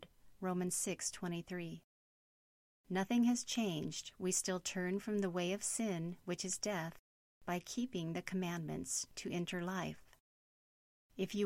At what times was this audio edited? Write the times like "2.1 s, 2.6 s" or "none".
none